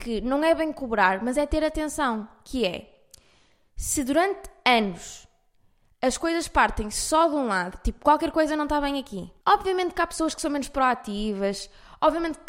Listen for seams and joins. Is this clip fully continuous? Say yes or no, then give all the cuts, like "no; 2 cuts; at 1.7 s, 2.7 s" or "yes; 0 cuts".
yes; 0 cuts